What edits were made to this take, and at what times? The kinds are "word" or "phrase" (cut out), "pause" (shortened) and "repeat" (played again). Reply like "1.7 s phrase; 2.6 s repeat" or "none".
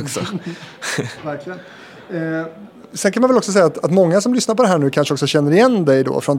none

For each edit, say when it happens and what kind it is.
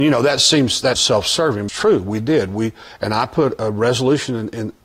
1.0 s word; 1.7 s phrase

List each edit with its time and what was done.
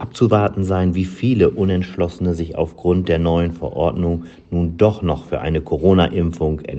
none

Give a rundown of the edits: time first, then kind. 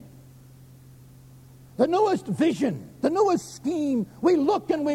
none

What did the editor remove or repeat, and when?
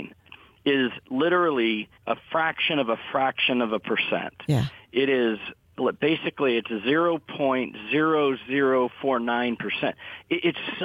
2.0 s pause

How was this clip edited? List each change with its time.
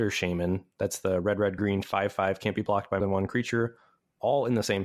1.6 s word; 3.0 s word

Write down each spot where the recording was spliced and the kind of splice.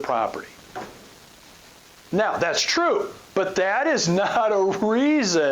1.8 s pause; 3.3 s pause

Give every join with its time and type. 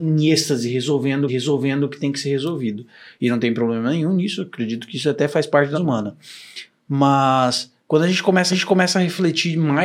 1.3 s repeat; 5.7 s word; 7.8 s pause; 8.5 s repeat

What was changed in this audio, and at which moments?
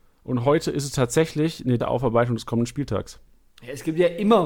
1.8 s word

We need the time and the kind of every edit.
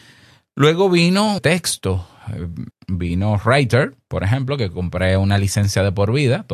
1.4 s phrase; 2.7 s word

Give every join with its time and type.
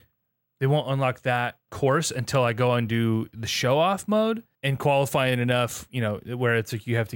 none

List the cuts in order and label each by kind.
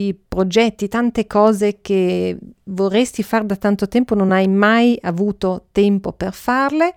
none

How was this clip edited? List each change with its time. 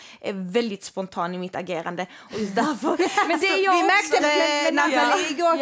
4.2 s phrase

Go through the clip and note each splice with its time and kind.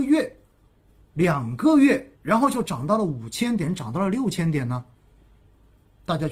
2.2 s pause

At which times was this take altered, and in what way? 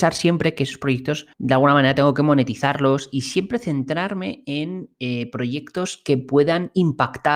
1.3 s pause

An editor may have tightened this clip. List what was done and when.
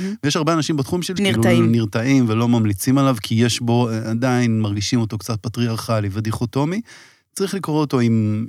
1.2 s word

